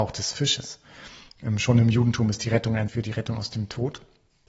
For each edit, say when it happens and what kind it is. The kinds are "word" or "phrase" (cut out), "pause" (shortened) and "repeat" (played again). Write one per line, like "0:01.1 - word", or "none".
0:02.9 - word